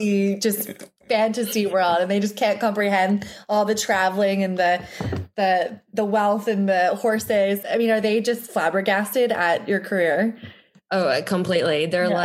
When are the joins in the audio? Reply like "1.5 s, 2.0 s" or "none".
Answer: 7.6 s

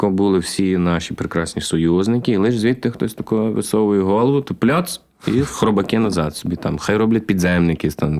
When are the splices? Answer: none

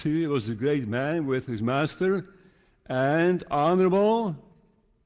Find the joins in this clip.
none

